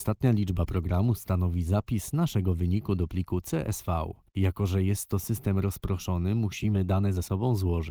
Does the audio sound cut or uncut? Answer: uncut